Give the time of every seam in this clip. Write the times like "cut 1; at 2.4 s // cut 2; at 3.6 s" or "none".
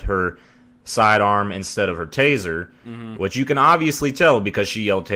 none

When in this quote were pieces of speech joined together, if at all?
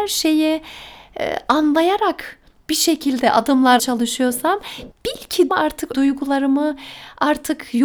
cut 1; at 3.8 s // cut 2; at 5.5 s // cut 3; at 5.9 s

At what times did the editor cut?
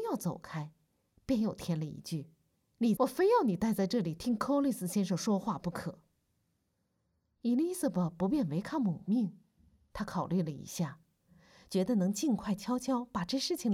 cut 1; at 3.0 s

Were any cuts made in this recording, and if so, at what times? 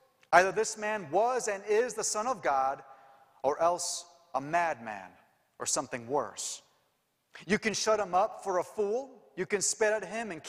none

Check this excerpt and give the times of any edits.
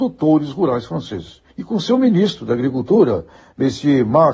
cut 1; at 1.5 s

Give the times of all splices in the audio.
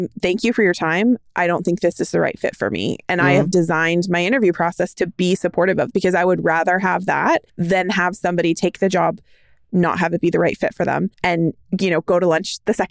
cut 1; at 5.9 s // cut 2; at 7.5 s // cut 3; at 11.1 s

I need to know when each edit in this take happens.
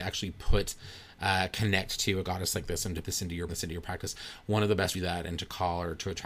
cut 1; at 3.0 s // cut 2; at 3.5 s // cut 3; at 4.9 s

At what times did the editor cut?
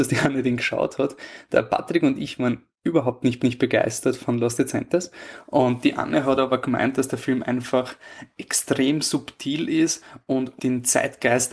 cut 1; at 3.4 s // cut 2; at 10.6 s

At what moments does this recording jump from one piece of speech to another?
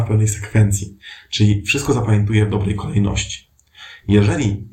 none

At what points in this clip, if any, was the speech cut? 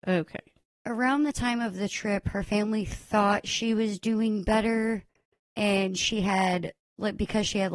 none

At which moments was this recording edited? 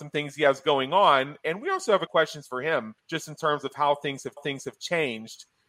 cut 1; at 2.1 s // cut 2; at 3.0 s // cut 3; at 4.4 s

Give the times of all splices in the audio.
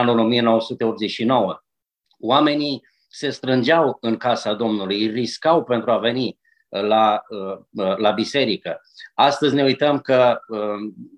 none

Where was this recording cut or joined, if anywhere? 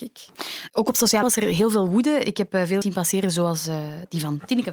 cut 1; at 1.2 s // cut 2; at 2.8 s

